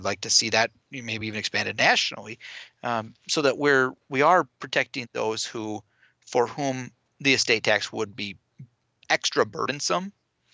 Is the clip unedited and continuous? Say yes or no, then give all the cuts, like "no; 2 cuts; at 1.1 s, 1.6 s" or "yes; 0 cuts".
yes; 0 cuts